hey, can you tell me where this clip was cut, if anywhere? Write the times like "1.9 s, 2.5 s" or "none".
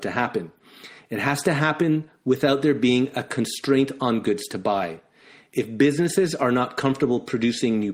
none